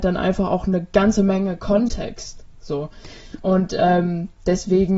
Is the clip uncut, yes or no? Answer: yes